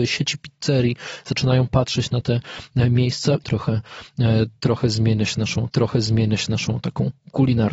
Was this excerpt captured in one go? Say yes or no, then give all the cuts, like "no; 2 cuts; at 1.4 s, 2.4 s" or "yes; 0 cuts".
no; 2 cuts; at 3.4 s, 5.7 s